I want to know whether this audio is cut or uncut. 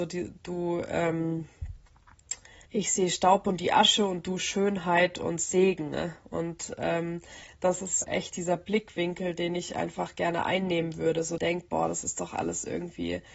cut